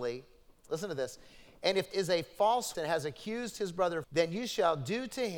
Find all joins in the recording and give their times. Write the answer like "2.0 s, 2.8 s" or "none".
1.9 s, 2.7 s, 4.0 s